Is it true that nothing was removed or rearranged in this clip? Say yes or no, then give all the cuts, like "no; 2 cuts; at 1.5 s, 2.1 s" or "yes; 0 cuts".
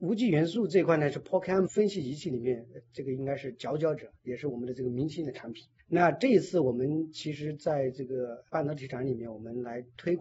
no; 2 cuts; at 1.7 s, 5.8 s